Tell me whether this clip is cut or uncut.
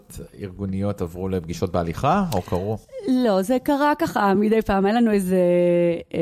uncut